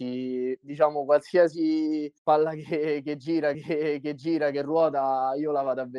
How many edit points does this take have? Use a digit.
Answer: 2